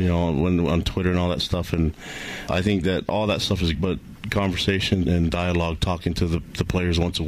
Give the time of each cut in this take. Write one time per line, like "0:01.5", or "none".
0:02.5
0:03.7
0:05.0